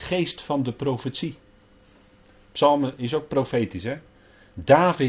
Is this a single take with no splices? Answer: yes; 0 cuts

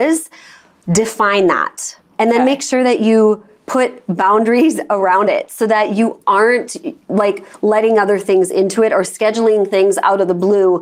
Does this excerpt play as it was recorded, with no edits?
yes; 0 cuts

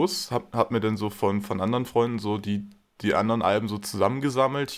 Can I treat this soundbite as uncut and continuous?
yes; 0 cuts

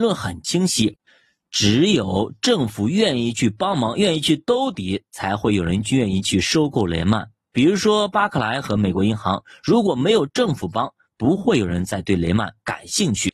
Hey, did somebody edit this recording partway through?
no; 0 cuts

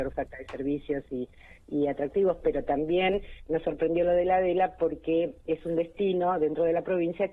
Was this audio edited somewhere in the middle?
no; 0 cuts

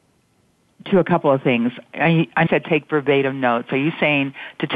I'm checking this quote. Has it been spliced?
yes; 1 cut; at 2.5 s

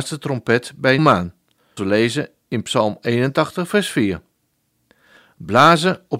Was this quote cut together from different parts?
yes; 2 cuts; at 1.0 s, 1.8 s

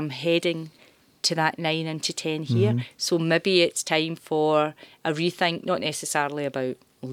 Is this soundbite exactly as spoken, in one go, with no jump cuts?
yes; 0 cuts

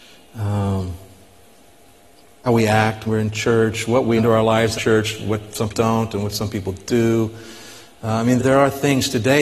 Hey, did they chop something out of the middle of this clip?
yes; 6 cuts; at 2.5 s, 3.1 s, 4.2 s, 4.8 s, 5.7 s, 8.4 s

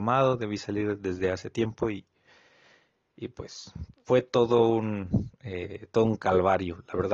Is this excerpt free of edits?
yes; 0 cuts

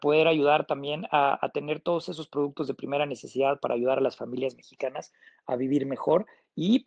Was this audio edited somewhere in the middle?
no; 0 cuts

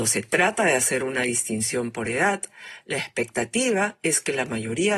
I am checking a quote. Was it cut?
no; 0 cuts

